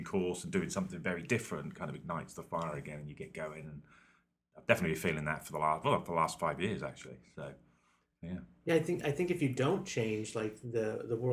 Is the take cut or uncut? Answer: uncut